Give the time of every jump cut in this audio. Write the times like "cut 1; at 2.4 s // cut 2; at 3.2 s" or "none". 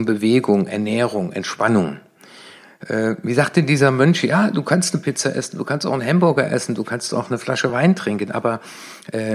none